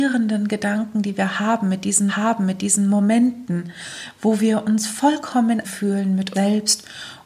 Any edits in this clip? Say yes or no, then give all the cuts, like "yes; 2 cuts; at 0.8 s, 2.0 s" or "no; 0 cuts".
yes; 3 cuts; at 2.1 s, 5.6 s, 6.3 s